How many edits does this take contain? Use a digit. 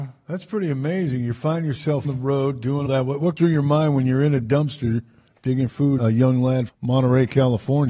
6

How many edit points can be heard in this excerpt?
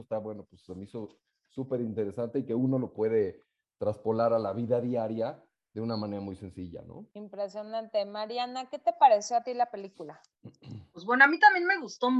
1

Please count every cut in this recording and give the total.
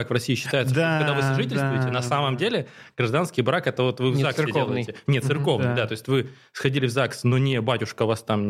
0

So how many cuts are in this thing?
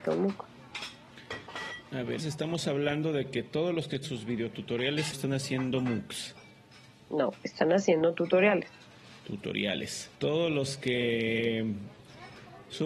4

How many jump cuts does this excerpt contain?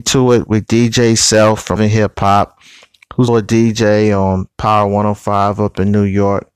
2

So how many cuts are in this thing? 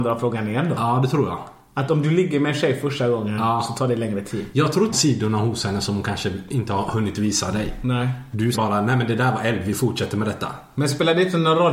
2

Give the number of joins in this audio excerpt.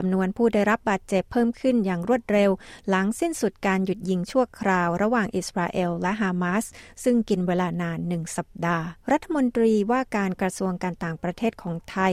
1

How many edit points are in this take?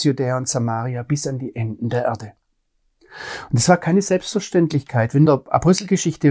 1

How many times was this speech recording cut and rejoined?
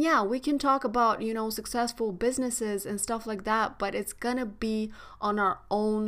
0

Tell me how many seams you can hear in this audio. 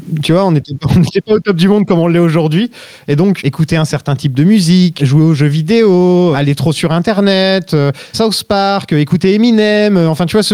4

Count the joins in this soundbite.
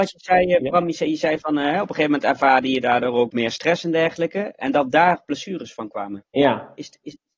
1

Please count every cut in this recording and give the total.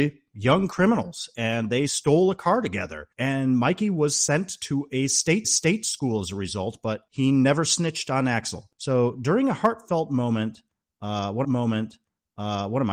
3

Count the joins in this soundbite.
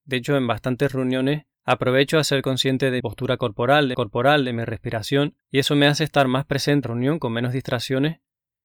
5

